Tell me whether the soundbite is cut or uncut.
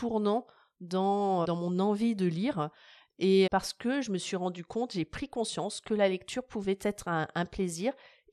cut